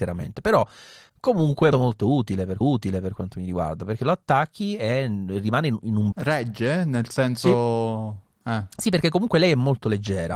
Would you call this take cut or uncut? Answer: cut